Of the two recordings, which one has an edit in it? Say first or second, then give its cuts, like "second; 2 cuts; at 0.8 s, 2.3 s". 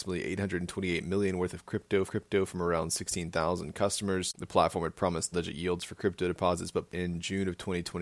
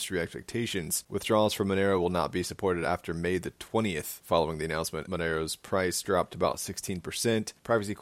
first; 3 cuts; at 2.1 s, 5.3 s, 6.9 s